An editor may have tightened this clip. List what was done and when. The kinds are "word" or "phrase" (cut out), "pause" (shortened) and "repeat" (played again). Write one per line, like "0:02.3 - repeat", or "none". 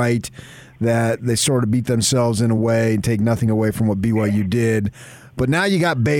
none